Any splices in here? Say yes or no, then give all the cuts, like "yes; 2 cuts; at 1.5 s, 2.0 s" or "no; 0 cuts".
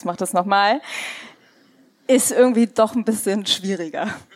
no; 0 cuts